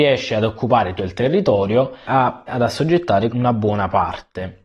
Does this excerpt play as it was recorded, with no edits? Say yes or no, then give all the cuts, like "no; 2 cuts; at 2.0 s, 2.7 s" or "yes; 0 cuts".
no; 4 cuts; at 1.0 s, 2.1 s, 2.5 s, 3.3 s